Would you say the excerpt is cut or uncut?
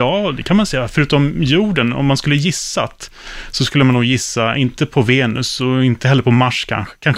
uncut